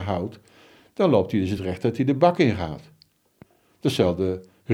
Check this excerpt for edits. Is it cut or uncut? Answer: uncut